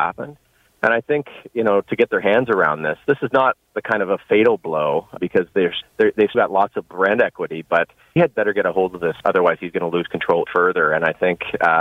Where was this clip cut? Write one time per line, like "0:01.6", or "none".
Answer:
0:05.2
0:05.8
0:06.3
0:08.2
0:09.2
0:10.5